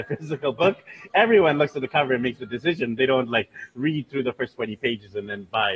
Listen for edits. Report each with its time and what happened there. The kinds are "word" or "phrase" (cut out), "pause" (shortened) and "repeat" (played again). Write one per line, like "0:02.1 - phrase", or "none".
none